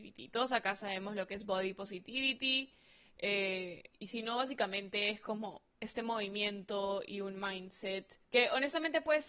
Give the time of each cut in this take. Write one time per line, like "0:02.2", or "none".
0:03.9
0:05.7
0:08.2